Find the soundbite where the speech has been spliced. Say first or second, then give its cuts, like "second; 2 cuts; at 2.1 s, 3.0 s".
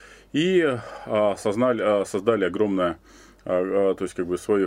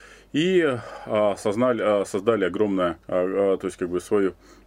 second; 1 cut; at 3.0 s